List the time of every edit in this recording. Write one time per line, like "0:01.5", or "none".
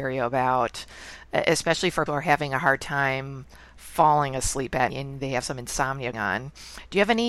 0:02.1
0:04.9
0:06.1